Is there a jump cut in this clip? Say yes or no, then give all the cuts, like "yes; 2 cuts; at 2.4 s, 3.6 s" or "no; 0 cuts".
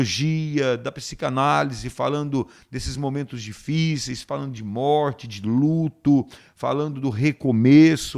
no; 0 cuts